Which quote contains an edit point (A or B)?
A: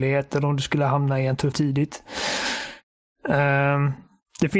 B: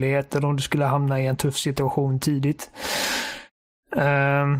A